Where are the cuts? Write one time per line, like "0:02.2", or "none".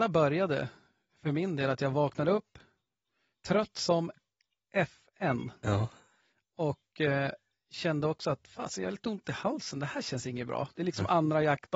none